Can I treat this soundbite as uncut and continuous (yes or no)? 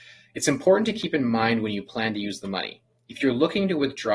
yes